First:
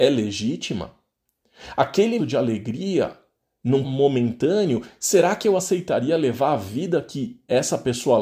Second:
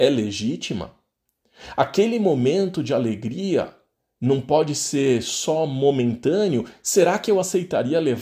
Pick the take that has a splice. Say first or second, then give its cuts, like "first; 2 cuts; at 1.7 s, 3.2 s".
first; 2 cuts; at 2.2 s, 3.8 s